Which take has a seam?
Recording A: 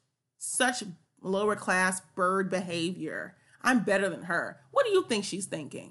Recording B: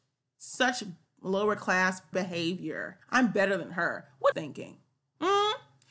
B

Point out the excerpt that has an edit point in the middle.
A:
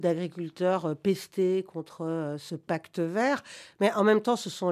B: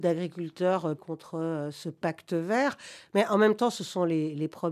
B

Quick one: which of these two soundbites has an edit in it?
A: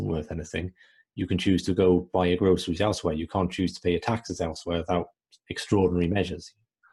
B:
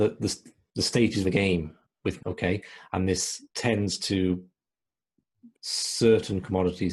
B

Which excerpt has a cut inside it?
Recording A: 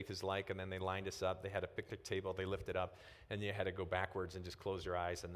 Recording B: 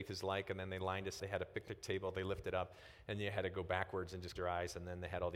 B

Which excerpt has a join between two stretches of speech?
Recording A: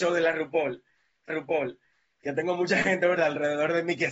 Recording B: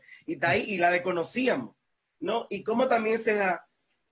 A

